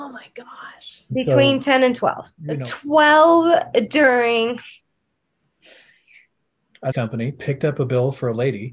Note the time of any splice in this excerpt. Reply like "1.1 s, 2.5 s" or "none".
6.9 s